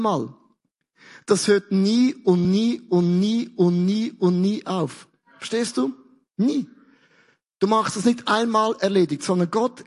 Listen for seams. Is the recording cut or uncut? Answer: uncut